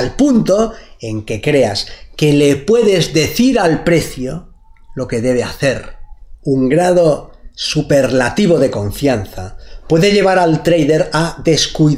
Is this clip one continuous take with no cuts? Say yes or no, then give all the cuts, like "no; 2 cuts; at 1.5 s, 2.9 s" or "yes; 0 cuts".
yes; 0 cuts